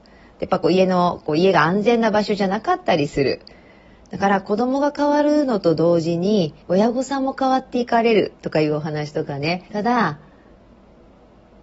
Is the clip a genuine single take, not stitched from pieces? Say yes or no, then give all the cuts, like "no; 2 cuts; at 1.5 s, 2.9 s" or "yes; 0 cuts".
no; 3 cuts; at 6.6 s, 8.3 s, 9.7 s